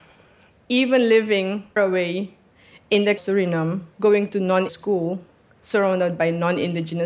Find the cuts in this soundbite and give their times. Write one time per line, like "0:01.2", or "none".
0:01.8
0:03.2
0:03.9
0:04.7